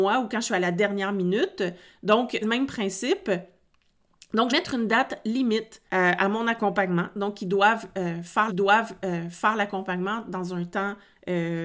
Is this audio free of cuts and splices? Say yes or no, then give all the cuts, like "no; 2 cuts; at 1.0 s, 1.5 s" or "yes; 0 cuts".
no; 4 cuts; at 2.4 s, 4.5 s, 5.9 s, 8.5 s